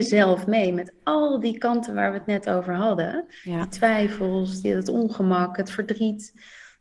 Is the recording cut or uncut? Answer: uncut